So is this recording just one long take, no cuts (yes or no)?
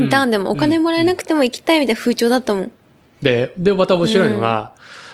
yes